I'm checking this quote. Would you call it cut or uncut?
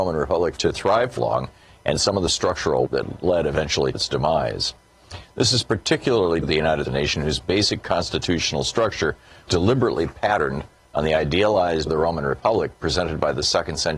cut